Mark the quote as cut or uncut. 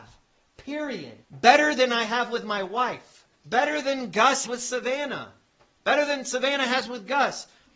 cut